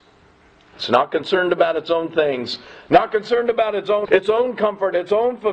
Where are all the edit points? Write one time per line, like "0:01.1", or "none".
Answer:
0:04.1